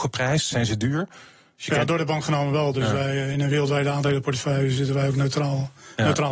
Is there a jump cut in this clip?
no; 0 cuts

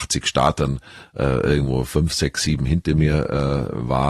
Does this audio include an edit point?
no; 0 cuts

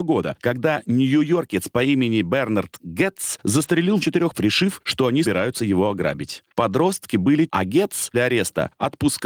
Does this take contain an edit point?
yes; 5 cuts; at 4.0 s, 4.3 s, 5.2 s, 7.5 s, 8.1 s

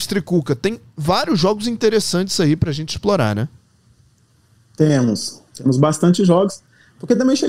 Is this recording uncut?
yes; 0 cuts

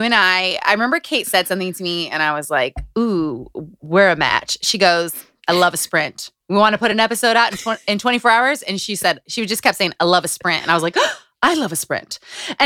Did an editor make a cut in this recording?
no; 0 cuts

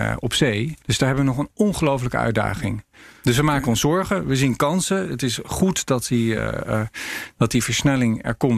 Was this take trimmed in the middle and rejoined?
no; 0 cuts

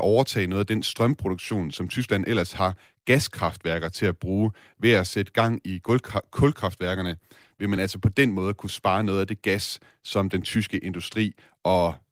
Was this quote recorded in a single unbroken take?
yes; 0 cuts

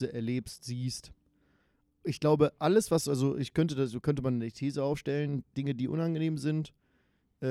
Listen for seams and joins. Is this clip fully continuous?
yes; 0 cuts

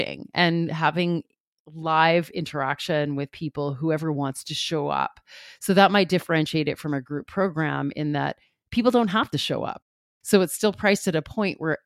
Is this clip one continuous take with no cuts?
yes; 0 cuts

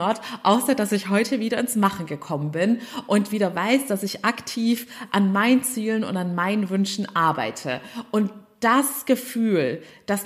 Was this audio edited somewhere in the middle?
no; 0 cuts

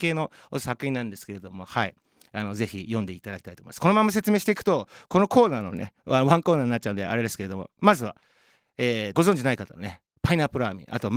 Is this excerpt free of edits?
no; 1 cut; at 9.1 s

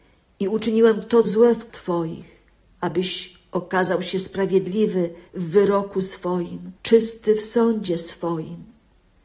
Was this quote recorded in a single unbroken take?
no; 5 cuts; at 1.2 s, 1.7 s, 2.7 s, 5.3 s, 6.8 s

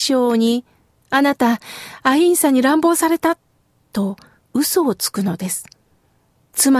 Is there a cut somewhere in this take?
no; 0 cuts

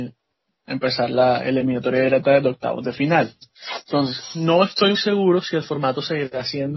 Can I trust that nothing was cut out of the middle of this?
no; 1 cut; at 4.9 s

